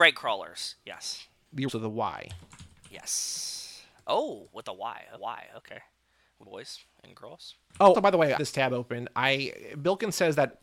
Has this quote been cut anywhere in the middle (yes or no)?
yes